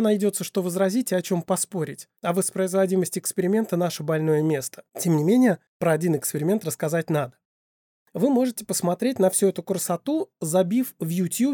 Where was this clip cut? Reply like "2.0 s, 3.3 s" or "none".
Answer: 2.2 s, 4.9 s, 5.7 s

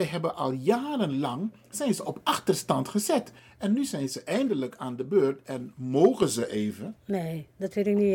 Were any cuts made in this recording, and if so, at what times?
none

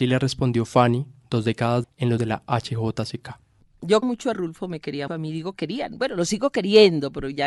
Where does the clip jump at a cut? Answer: 1.8 s, 2.2 s, 4.0 s, 4.3 s, 5.1 s

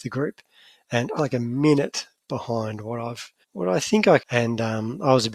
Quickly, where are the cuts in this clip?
1.2 s, 3.4 s, 4.2 s

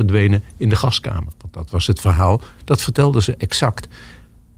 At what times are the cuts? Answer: none

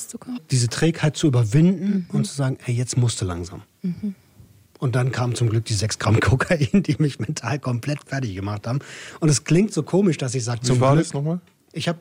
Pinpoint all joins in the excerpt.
none

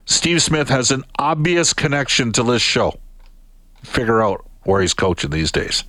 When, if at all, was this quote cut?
none

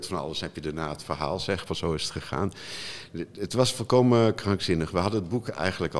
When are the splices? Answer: 1.7 s

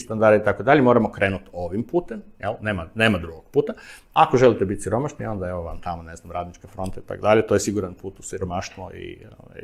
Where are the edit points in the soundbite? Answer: none

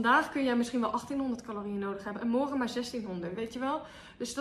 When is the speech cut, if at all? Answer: none

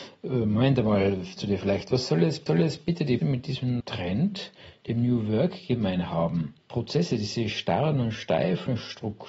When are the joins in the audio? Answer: 1.4 s, 2.5 s, 3.2 s, 3.8 s, 6.6 s

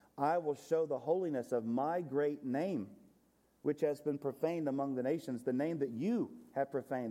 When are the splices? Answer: none

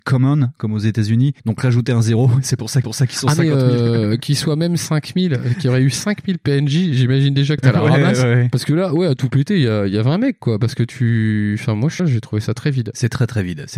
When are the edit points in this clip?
1.4 s, 2.8 s, 7.6 s, 12.0 s

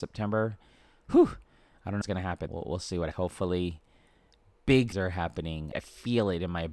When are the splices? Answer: 2.0 s, 2.5 s, 3.1 s, 4.9 s, 5.7 s

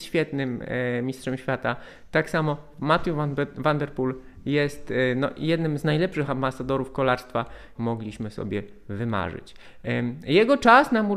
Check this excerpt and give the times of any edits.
7.7 s

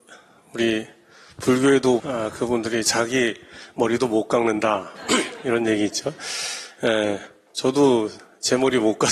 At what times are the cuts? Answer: 2.0 s, 5.0 s

